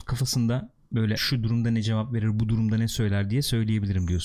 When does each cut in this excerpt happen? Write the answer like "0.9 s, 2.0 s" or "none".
1.2 s